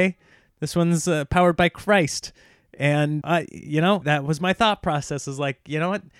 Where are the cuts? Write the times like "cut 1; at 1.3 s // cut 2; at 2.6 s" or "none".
cut 1; at 3.2 s // cut 2; at 4.0 s

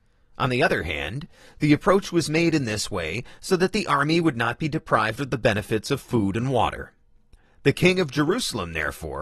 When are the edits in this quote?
none

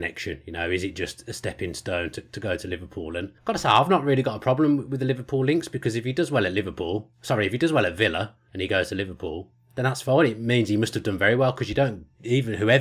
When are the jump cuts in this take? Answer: cut 1; at 3.4 s // cut 2; at 9.5 s

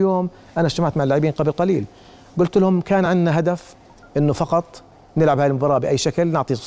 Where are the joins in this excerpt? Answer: none

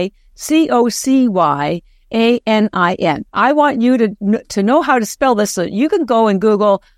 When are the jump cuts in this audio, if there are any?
cut 1; at 3.3 s

